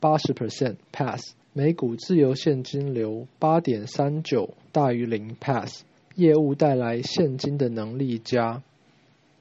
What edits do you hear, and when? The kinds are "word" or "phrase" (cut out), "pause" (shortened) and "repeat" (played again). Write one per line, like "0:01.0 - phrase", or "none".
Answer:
0:01.4 - pause
0:06.0 - pause